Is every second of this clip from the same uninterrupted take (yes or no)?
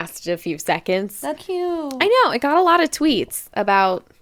no